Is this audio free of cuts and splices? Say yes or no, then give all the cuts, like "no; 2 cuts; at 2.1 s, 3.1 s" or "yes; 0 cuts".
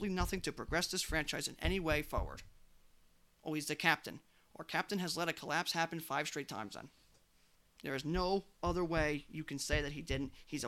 yes; 0 cuts